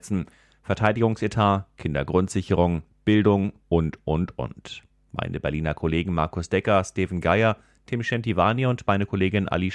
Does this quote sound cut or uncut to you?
uncut